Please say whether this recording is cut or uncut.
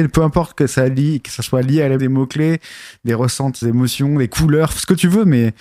cut